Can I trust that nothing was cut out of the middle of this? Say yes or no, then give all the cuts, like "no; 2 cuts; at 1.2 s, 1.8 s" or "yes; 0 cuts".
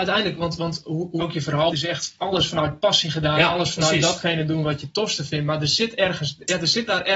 no; 2 cuts; at 1.2 s, 1.7 s